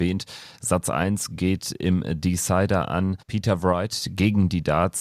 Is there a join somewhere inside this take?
yes; 1 cut; at 3.2 s

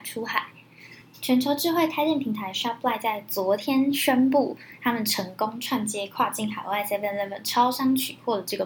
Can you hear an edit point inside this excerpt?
no; 0 cuts

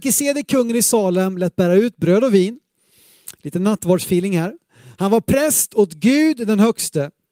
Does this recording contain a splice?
no; 0 cuts

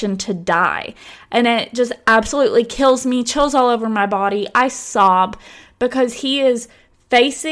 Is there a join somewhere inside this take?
no; 0 cuts

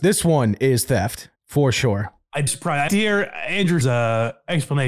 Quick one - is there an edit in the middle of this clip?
yes; 4 cuts; at 1.4 s, 2.5 s, 2.9 s, 3.8 s

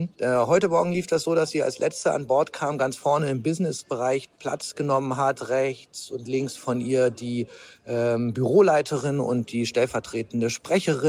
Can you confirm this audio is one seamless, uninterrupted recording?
yes; 0 cuts

